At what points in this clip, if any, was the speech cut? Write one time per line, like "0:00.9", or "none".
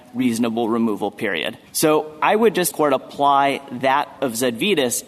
0:01.7
0:02.7
0:04.2